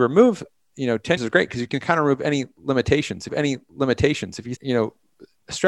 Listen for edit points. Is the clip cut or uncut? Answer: cut